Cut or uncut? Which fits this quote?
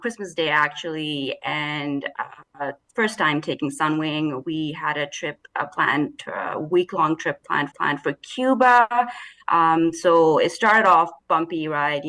cut